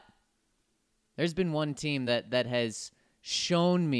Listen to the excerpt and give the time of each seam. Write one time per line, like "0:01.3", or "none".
none